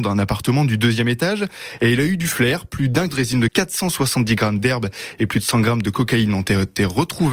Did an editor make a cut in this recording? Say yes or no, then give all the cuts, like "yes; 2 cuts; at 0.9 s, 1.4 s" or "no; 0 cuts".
yes; 2 cuts; at 3.1 s, 3.5 s